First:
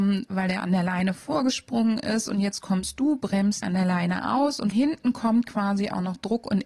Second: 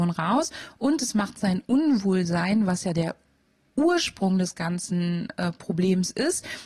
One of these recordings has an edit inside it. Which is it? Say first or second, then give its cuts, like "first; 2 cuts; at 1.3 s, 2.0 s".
first; 2 cuts; at 3.6 s, 4.7 s